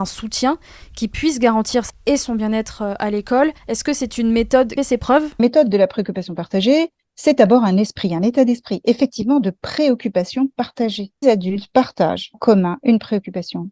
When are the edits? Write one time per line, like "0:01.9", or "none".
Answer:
0:01.9
0:03.6
0:04.8
0:05.4
0:11.2
0:12.3